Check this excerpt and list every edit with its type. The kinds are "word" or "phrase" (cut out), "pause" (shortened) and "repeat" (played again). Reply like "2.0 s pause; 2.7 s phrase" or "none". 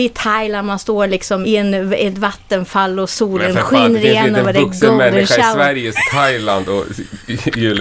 1.4 s word; 5.9 s phrase